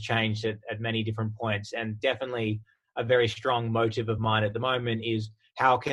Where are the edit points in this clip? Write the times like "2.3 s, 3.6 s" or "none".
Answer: none